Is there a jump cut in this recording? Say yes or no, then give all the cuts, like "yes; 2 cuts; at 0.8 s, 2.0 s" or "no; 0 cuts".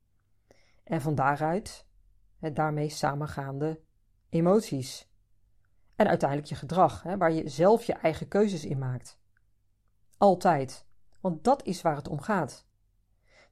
no; 0 cuts